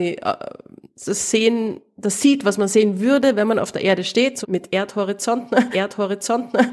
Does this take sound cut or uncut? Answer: cut